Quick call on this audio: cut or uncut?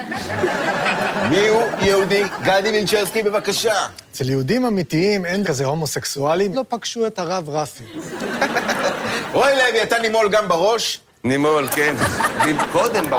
cut